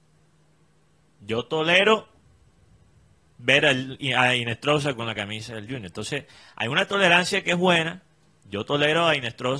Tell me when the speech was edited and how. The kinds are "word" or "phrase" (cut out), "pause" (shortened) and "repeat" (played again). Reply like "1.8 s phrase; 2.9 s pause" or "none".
none